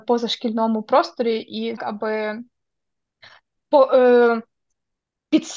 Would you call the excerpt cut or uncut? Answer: cut